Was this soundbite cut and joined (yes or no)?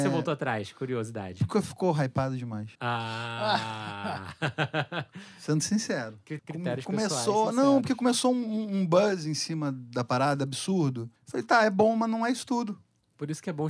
yes